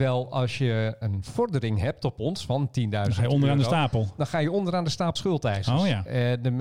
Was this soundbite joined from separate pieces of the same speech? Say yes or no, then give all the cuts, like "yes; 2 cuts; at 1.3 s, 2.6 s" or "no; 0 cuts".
yes; 2 cuts; at 1.0 s, 5.2 s